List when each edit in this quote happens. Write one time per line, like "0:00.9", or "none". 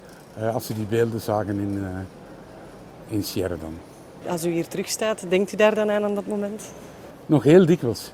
none